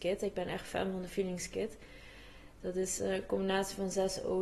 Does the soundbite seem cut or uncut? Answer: uncut